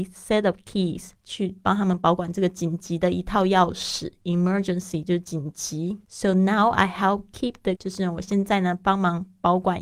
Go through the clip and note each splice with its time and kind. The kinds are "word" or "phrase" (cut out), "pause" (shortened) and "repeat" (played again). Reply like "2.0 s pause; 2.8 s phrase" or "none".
1.1 s pause; 6.0 s pause; 7.7 s word